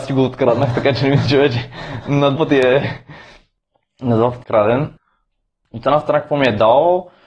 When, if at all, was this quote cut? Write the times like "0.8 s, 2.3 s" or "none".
2.4 s, 4.4 s